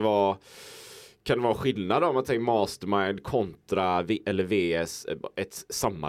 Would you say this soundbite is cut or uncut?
uncut